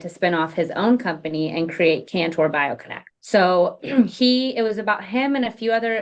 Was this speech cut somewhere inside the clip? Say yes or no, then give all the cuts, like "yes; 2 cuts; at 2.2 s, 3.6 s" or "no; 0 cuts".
yes; 1 cut; at 3.1 s